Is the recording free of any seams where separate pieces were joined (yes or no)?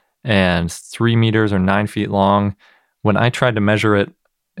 yes